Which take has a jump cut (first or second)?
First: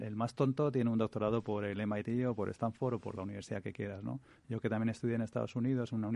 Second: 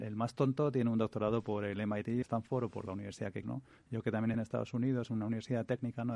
second